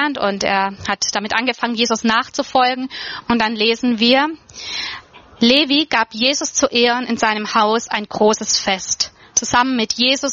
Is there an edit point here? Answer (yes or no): no